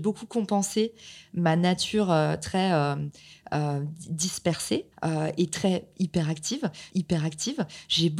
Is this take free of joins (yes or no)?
no